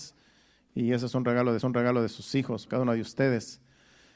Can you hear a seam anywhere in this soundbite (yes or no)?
yes